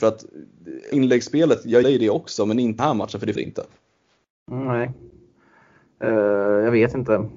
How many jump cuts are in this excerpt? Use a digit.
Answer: 4